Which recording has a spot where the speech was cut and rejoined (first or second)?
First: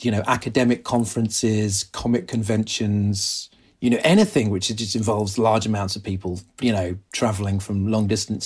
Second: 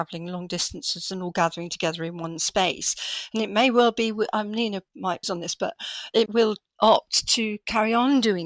second